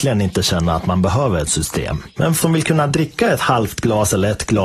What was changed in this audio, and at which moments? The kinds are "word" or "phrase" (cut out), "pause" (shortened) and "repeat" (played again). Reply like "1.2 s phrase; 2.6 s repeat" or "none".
1.5 s word; 2.4 s word